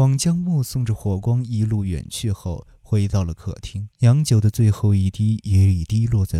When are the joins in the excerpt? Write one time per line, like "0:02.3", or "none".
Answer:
0:03.9